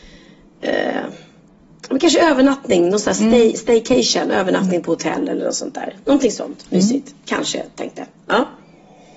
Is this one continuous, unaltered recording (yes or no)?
yes